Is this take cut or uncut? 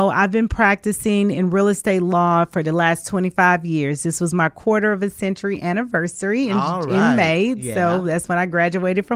uncut